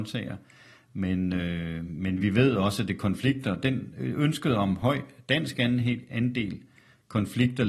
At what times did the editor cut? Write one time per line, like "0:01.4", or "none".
none